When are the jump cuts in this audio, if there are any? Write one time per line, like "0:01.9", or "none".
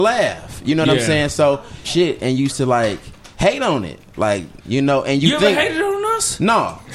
0:01.8
0:02.5
0:03.3
0:04.6